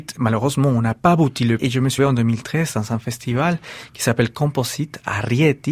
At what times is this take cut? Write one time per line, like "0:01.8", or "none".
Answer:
0:01.6
0:02.0